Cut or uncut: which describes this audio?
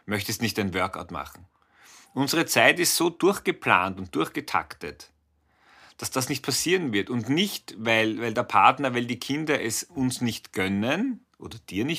uncut